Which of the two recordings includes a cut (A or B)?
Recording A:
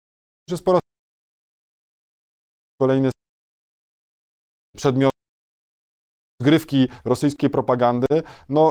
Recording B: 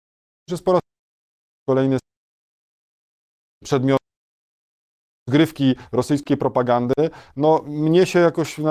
B